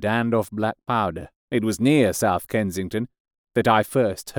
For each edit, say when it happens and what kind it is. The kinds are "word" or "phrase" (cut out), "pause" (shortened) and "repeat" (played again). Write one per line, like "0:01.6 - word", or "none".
0:01.4 - pause